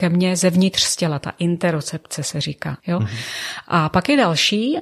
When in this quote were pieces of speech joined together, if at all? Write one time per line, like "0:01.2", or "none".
0:02.8